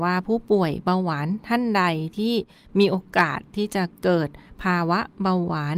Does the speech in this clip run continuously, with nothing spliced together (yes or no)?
yes